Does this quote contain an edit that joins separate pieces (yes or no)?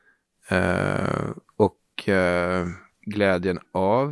no